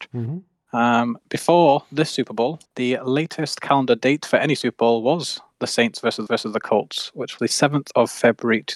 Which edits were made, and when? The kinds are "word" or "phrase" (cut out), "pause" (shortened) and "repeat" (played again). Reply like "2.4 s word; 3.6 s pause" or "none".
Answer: 2.7 s pause; 6.3 s repeat; 7.4 s word